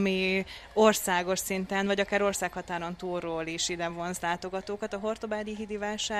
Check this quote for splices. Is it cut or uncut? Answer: uncut